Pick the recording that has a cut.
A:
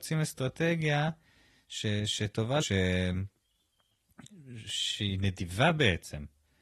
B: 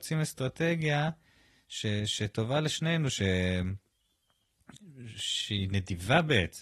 A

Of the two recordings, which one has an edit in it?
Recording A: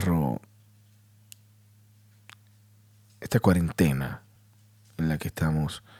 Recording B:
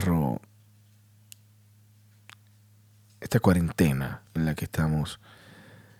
B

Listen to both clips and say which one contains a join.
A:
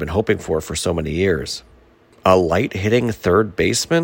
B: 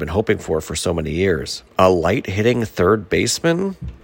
B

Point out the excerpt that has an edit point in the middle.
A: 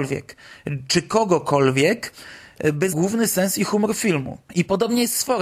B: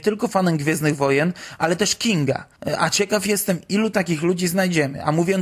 A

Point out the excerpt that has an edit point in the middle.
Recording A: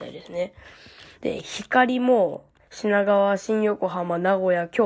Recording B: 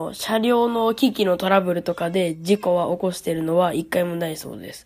A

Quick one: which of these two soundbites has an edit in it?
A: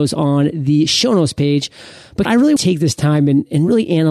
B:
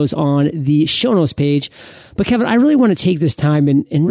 A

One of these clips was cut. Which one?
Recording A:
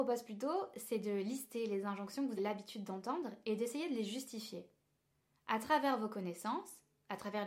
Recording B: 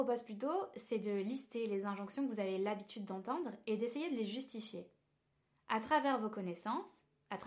A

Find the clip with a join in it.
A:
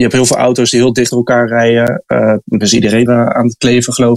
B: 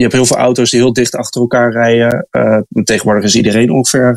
A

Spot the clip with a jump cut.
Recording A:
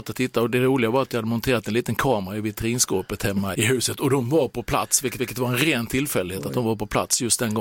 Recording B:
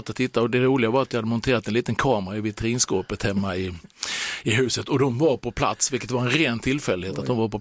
A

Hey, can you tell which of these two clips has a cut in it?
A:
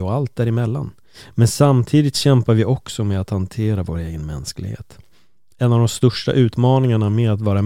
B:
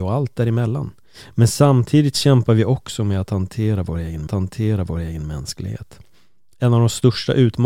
B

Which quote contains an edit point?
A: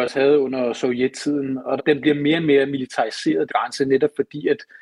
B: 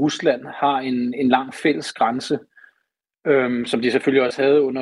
A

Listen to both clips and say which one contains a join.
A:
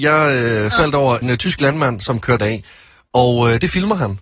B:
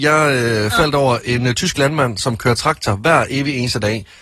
A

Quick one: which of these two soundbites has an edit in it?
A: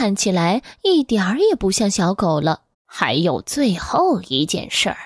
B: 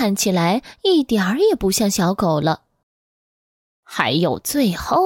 A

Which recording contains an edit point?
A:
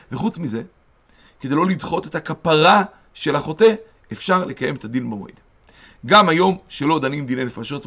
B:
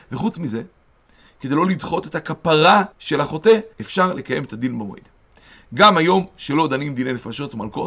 B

